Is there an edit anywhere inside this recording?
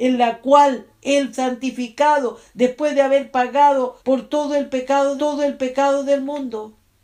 yes; 3 cuts; at 1.3 s, 4.0 s, 5.2 s

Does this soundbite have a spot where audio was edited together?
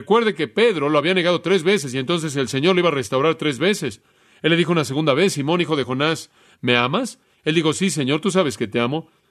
no; 0 cuts

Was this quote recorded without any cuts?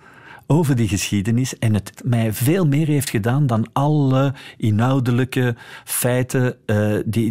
no; 1 cut; at 2.0 s

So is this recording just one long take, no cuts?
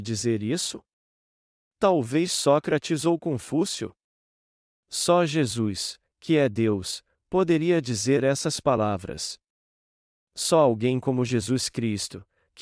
yes; 0 cuts

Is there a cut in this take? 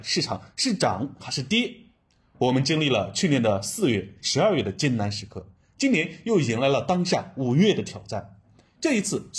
yes; 1 cut; at 4.2 s

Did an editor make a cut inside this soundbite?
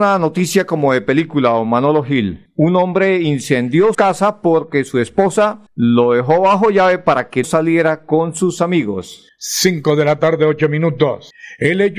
yes; 2 cuts; at 3.9 s, 7.4 s

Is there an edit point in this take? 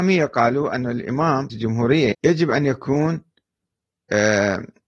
yes; 2 cuts; at 1.5 s, 2.1 s

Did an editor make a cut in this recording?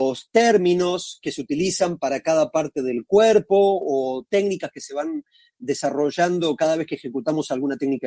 no; 0 cuts

